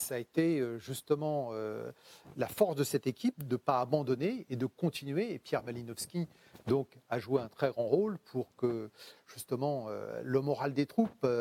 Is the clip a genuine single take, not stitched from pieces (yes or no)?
yes